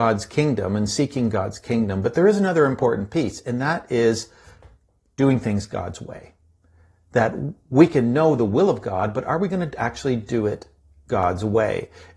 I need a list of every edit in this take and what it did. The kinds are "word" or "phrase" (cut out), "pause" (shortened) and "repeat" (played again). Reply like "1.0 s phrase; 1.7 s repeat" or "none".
none

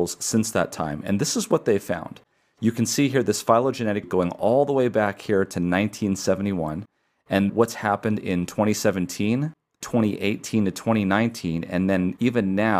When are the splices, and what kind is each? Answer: 4.0 s word; 7.5 s word

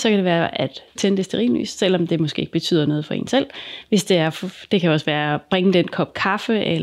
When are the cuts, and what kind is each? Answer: 1.0 s phrase

